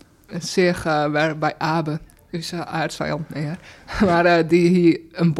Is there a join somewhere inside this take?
no; 0 cuts

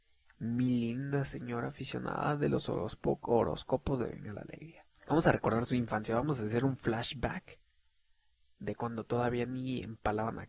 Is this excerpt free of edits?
no; 1 cut; at 5.0 s

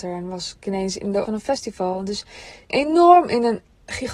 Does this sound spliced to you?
yes; 2 cuts; at 1.3 s, 2.7 s

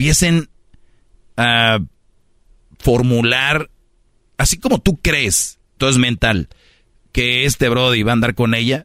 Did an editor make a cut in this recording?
yes; 1 cut; at 5.8 s

